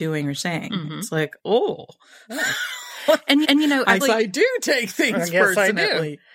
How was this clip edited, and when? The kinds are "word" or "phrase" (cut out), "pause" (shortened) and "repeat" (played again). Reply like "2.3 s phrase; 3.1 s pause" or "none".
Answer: 1.4 s pause; 3.4 s repeat; 4.0 s word